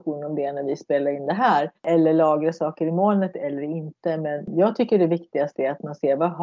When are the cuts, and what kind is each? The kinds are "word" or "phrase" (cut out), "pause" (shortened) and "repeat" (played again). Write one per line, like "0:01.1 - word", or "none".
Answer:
0:01.8 - pause